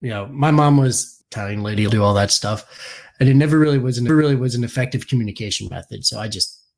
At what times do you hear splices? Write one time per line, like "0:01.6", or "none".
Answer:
0:01.2
0:01.9
0:04.1